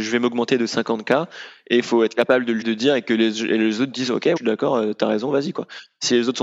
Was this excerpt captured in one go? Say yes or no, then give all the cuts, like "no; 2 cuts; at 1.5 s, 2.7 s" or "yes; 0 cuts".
no; 2 cuts; at 2.6 s, 4.4 s